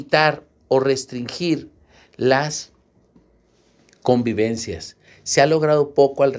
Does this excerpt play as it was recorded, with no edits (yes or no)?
yes